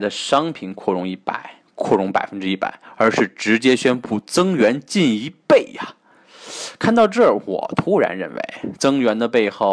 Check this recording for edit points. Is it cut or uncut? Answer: uncut